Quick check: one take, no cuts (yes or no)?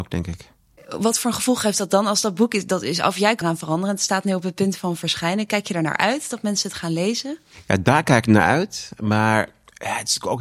no